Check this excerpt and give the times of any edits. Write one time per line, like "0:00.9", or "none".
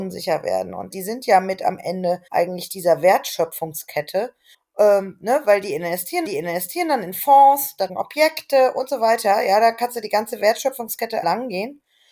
0:00.9
0:02.3
0:04.5
0:06.2
0:07.9
0:11.2